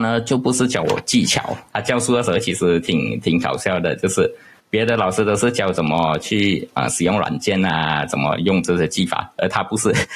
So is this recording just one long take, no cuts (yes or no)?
yes